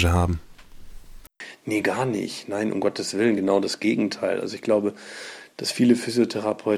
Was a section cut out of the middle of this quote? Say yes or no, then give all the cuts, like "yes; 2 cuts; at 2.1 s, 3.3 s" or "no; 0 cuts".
no; 0 cuts